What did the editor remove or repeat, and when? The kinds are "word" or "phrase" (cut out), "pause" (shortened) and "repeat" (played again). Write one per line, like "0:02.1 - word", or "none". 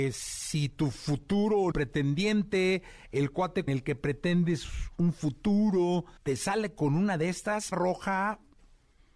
0:01.7 - phrase
0:03.7 - word
0:06.2 - pause
0:07.7 - word